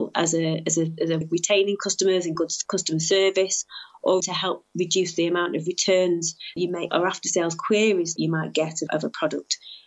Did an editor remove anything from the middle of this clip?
yes; 7 cuts; at 1.2 s, 2.4 s, 4.2 s, 6.6 s, 6.9 s, 8.2 s, 8.9 s

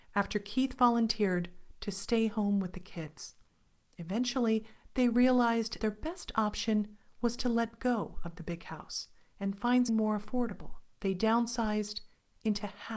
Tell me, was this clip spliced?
yes; 3 cuts; at 5.8 s, 9.9 s, 10.9 s

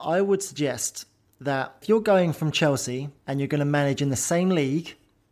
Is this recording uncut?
no; 2 cuts; at 1.8 s, 3.2 s

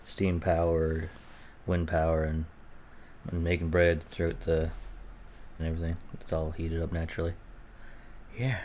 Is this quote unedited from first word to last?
no; 2 cuts; at 3.2 s, 5.6 s

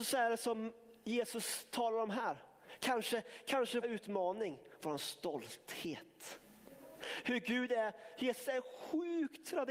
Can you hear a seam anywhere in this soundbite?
yes; 1 cut; at 3.8 s

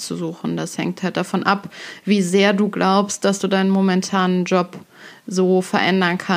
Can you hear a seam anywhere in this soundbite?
no; 0 cuts

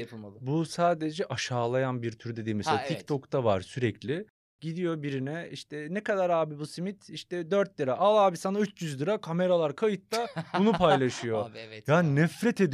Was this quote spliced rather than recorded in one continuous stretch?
no; 0 cuts

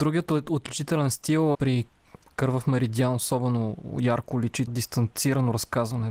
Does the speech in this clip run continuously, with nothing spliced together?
no; 2 cuts; at 1.5 s, 4.7 s

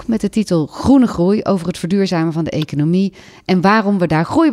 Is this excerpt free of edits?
yes; 0 cuts

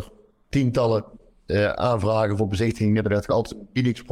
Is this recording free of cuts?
yes; 0 cuts

